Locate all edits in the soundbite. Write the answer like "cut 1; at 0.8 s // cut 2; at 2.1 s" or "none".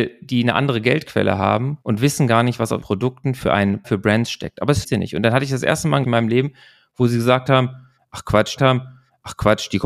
cut 1; at 1.8 s // cut 2; at 2.8 s // cut 3; at 3.8 s // cut 4; at 4.8 s // cut 5; at 6.0 s // cut 6; at 8.6 s